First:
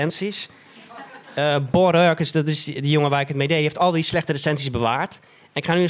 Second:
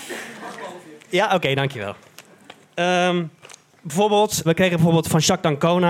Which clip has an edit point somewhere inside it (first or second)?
second